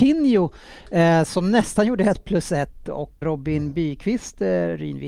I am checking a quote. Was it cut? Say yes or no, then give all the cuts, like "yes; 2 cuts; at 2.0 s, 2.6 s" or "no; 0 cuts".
yes; 1 cut; at 3.2 s